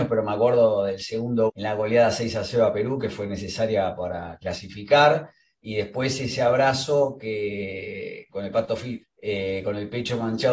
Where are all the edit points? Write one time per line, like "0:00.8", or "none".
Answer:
0:01.5
0:08.3
0:09.0